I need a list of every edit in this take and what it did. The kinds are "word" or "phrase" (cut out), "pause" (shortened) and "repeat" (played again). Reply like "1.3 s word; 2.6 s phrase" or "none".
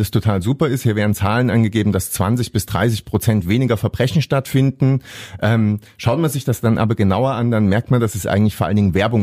none